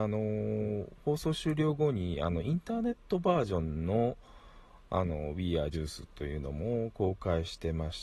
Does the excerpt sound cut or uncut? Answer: cut